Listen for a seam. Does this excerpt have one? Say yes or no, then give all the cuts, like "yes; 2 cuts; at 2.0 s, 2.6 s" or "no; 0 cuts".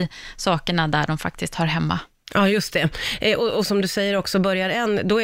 no; 0 cuts